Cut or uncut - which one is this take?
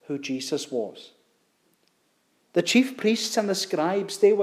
uncut